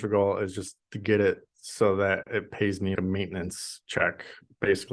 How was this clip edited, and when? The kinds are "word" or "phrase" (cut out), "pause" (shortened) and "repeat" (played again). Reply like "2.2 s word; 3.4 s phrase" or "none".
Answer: 2.9 s word